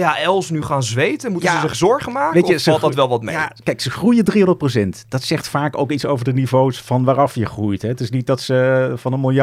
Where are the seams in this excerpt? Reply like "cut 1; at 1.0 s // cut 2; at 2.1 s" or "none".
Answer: none